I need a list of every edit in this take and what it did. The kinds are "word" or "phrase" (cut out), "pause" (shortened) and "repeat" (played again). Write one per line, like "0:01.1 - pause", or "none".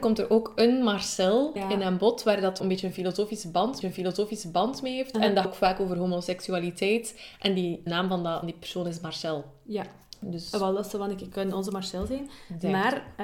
0:01.6 - word
0:02.6 - phrase
0:03.8 - repeat
0:05.4 - word
0:07.9 - word
0:08.4 - word